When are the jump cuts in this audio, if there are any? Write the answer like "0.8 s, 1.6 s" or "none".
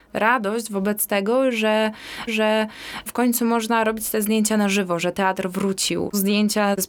2.3 s